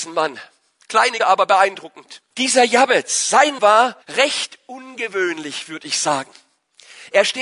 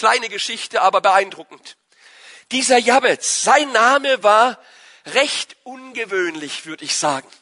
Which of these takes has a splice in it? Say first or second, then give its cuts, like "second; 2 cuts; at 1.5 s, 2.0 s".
first; 4 cuts; at 1.2 s, 2.3 s, 3.6 s, 4.0 s